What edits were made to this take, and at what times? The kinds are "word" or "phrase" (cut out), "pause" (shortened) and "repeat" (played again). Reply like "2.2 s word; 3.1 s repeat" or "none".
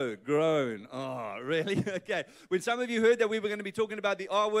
none